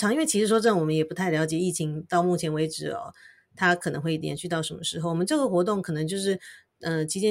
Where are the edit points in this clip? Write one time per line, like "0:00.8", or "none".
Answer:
none